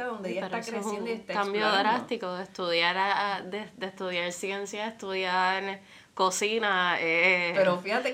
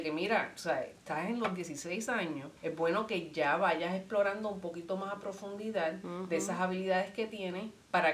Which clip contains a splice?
second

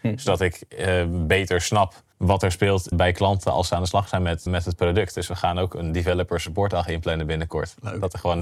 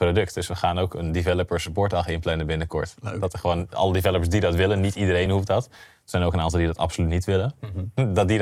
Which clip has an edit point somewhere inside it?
first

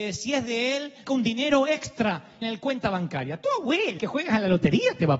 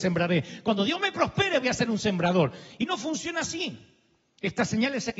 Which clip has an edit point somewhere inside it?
first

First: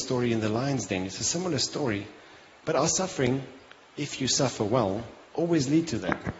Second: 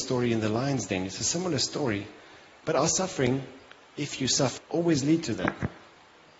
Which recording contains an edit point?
second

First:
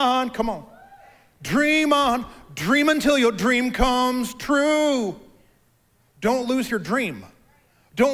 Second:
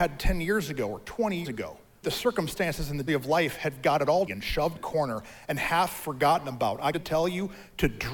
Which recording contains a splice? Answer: second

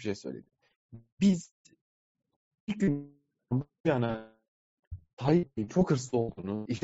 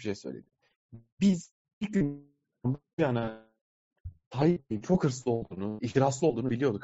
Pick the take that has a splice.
second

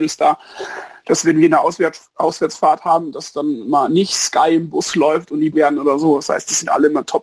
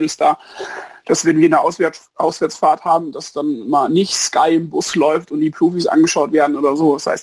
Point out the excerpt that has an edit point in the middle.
first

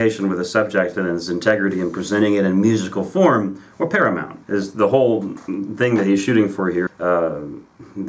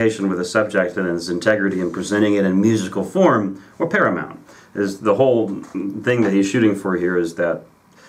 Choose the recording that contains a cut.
first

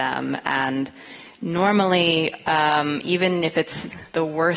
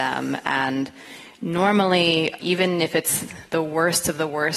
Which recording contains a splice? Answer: second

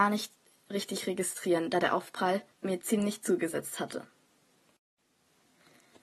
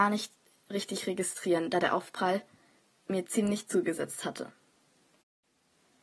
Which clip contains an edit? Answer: first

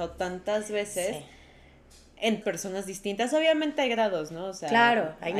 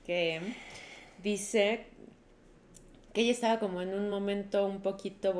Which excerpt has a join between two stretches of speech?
first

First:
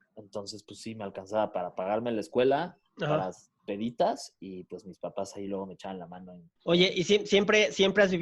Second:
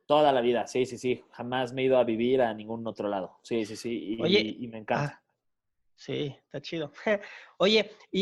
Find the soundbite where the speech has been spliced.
first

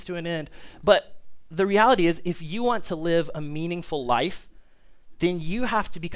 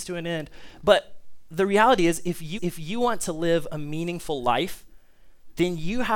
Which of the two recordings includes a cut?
second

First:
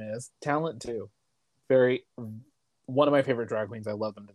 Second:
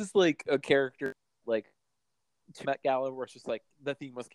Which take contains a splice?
second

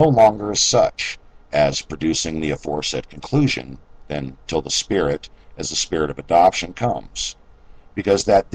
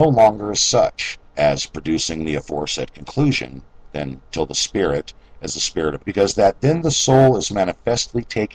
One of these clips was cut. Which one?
second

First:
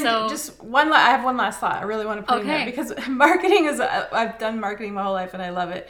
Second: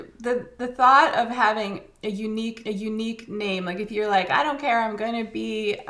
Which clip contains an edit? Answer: second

